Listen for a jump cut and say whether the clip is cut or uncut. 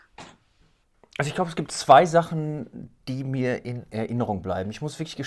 uncut